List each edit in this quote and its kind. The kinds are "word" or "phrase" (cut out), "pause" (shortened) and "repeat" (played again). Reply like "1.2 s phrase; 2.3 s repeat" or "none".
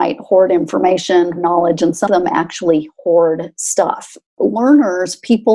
1.4 s word; 2.1 s word; 4.3 s pause